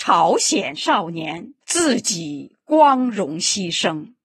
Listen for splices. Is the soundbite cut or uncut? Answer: cut